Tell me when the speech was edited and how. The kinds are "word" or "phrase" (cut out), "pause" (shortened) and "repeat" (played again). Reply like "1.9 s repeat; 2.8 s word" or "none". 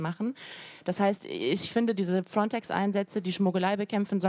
none